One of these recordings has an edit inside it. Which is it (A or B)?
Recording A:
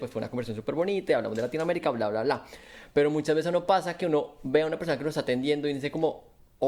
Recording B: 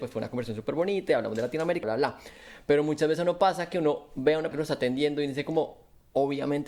B